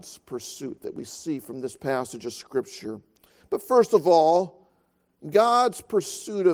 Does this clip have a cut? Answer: no; 0 cuts

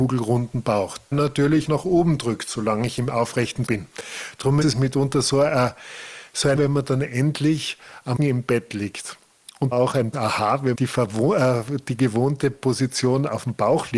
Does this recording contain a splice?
yes; 9 cuts; at 1.1 s, 1.7 s, 3.7 s, 4.6 s, 6.6 s, 8.2 s, 9.7 s, 10.1 s, 10.7 s

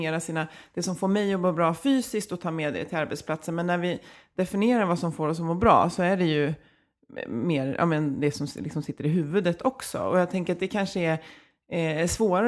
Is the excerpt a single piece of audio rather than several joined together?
yes; 0 cuts

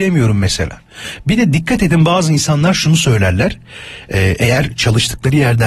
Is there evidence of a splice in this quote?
no; 0 cuts

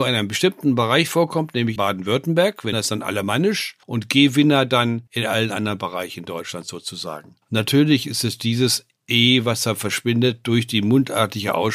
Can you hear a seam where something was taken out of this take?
yes; 5 cuts; at 1.8 s, 2.7 s, 3.8 s, 5.1 s, 7.4 s

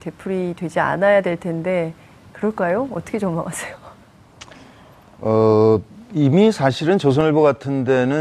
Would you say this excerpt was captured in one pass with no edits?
yes; 0 cuts

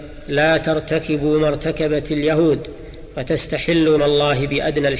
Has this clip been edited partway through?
yes; 1 cut; at 4.0 s

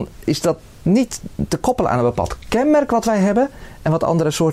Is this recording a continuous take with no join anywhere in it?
yes; 0 cuts

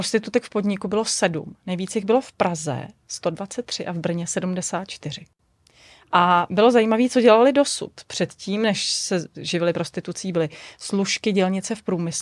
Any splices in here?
no; 0 cuts

